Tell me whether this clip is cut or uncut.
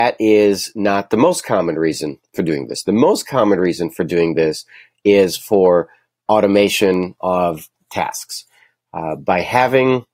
cut